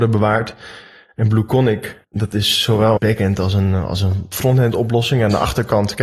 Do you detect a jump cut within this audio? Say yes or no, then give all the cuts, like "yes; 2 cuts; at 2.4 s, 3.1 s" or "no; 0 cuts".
yes; 1 cut; at 3.0 s